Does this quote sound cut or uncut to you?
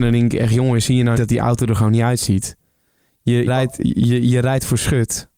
cut